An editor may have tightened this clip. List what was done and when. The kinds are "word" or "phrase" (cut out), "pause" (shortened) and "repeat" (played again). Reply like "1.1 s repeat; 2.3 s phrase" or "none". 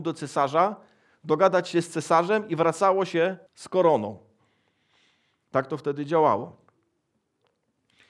3.5 s pause

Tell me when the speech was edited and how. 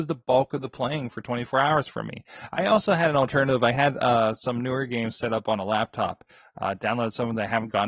none

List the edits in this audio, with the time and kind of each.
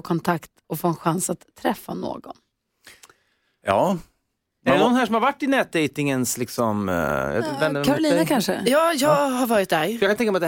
none

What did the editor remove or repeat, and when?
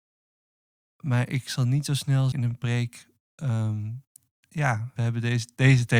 2.3 s word; 5.0 s word

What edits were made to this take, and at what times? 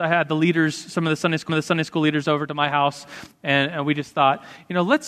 1.5 s repeat

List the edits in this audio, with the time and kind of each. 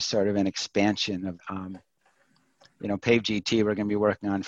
1.4 s word

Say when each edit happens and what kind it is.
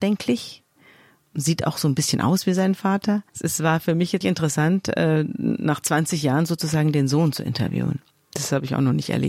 3.3 s pause; 4.2 s word; 8.1 s pause

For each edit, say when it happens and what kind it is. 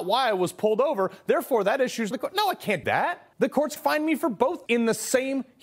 2.1 s phrase; 2.8 s word; 3.3 s pause; 3.8 s word; 4.7 s word

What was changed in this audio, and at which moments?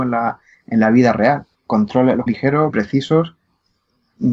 1.5 s pause; 2.3 s phrase; 2.7 s word

